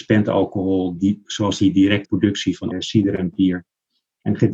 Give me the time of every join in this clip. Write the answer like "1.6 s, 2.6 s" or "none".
1.0 s, 2.0 s, 2.7 s